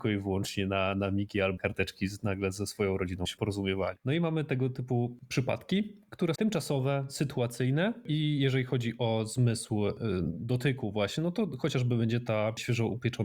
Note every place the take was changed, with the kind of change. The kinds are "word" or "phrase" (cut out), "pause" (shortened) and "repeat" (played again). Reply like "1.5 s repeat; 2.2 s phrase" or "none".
1.6 s word; 3.2 s word; 6.3 s word